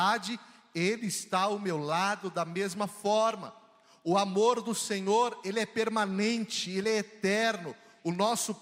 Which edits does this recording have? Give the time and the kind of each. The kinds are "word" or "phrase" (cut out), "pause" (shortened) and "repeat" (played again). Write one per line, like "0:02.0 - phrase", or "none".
none